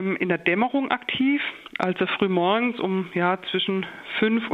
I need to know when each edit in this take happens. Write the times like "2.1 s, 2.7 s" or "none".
none